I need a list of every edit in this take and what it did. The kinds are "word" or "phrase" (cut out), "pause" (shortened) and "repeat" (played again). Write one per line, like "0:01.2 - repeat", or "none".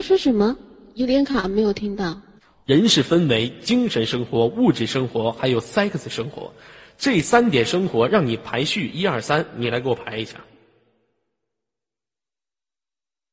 none

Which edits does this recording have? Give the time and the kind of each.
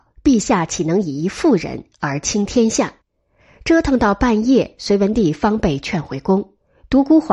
0:03.0 - pause

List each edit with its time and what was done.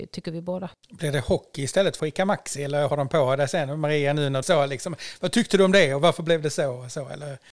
0:02.0 - phrase
0:02.9 - word
0:04.4 - phrase

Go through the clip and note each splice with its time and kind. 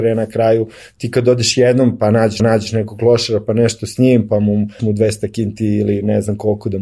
0:02.4 - repeat
0:04.8 - word

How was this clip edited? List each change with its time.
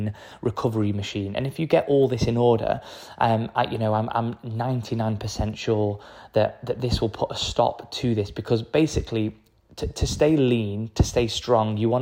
none

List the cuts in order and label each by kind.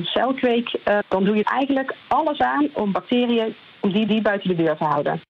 0:01.0 - word
0:01.4 - word
0:04.1 - repeat

